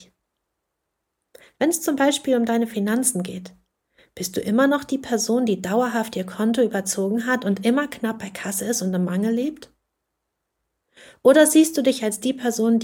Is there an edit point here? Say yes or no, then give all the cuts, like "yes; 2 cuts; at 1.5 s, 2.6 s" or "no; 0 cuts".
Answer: no; 0 cuts